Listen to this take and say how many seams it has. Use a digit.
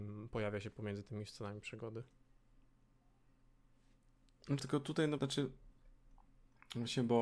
2